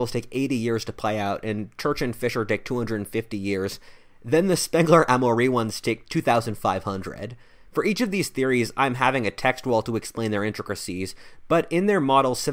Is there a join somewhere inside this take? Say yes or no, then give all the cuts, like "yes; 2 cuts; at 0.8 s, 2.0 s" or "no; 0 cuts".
no; 0 cuts